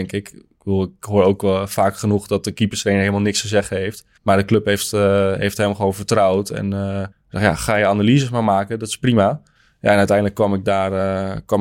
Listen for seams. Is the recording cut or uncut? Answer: cut